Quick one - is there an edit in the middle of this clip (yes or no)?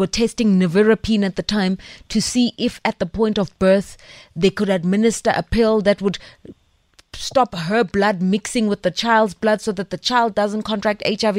no